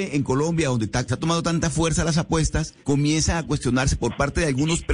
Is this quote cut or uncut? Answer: cut